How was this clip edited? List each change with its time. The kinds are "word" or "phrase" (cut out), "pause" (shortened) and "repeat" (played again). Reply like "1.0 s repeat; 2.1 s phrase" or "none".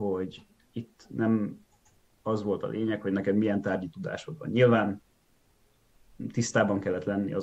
none

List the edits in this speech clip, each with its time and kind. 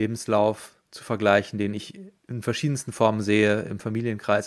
2.2 s pause

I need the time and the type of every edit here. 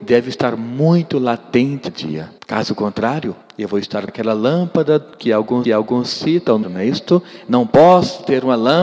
1.9 s phrase; 2.4 s pause; 3.4 s pause; 4.1 s word; 5.1 s pause; 5.6 s repeat; 6.6 s word

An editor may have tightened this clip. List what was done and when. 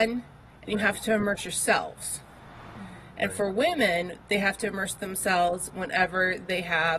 5.7 s word

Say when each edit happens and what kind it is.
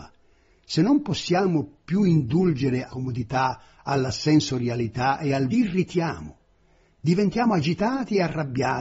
2.9 s word; 5.5 s phrase

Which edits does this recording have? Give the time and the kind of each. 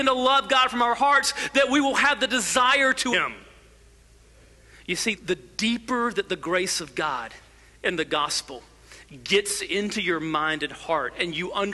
3.1 s word; 5.1 s word

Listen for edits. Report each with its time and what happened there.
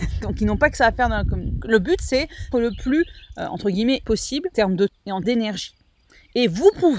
1.6 s word; 2.5 s word; 4.0 s word; 4.5 s word; 4.9 s word; 5.2 s word

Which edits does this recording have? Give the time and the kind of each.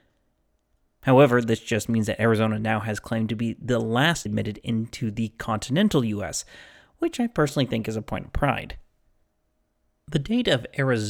4.3 s phrase

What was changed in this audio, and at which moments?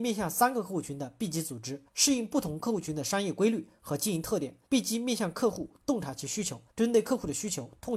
1.9 s pause; 4.7 s pause; 6.7 s pause

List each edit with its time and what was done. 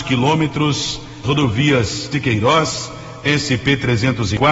1.2 s word; 2.1 s word

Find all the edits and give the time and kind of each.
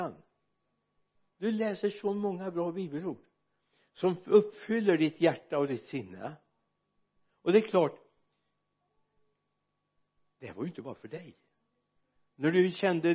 none

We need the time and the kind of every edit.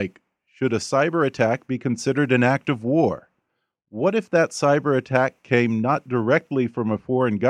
none

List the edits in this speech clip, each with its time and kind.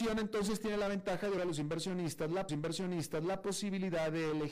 1.4 s word; 2.5 s repeat

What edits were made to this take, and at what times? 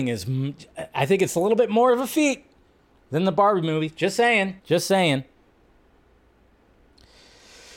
4.6 s pause

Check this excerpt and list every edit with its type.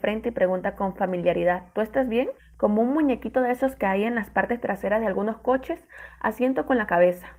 2.4 s pause

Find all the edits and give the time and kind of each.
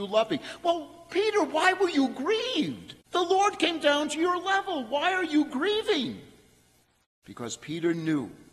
3.0 s pause

